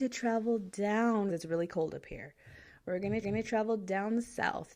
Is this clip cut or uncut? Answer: cut